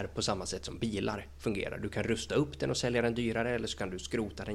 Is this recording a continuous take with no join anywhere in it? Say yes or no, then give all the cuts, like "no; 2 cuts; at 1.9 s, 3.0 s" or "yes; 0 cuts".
yes; 0 cuts